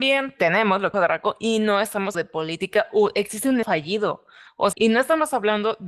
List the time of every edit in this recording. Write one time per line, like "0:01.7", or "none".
0:00.9
0:02.1
0:03.6
0:04.7